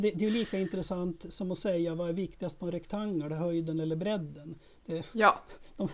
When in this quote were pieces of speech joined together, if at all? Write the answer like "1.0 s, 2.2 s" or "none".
none